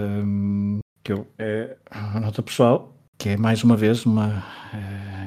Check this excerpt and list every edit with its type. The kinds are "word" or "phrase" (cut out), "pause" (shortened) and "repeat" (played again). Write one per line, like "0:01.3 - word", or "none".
0:00.9 - pause
0:01.9 - pause